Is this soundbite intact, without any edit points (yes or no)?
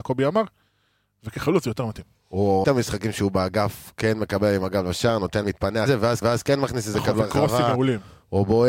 no